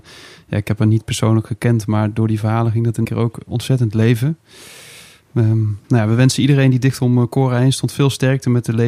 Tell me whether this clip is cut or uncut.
cut